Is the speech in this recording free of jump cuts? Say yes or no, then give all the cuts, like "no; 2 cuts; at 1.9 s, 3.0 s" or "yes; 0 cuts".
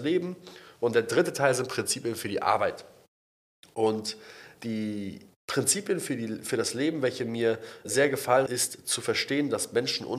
no; 3 cuts; at 4.6 s, 7.8 s, 8.5 s